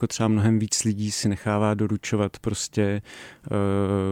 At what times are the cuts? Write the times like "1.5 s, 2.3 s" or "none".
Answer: none